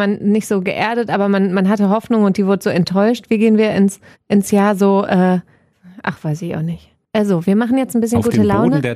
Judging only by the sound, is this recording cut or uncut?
cut